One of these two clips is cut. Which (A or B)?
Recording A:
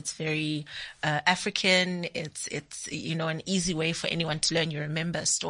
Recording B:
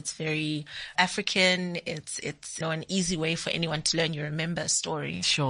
B